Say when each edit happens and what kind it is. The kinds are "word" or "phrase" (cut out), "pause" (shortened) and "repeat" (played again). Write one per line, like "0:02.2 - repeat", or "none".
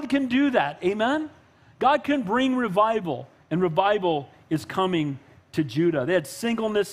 none